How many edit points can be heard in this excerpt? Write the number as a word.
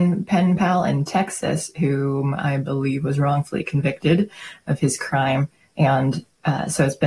zero